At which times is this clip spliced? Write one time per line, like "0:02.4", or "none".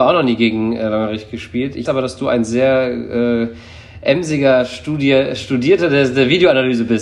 0:01.9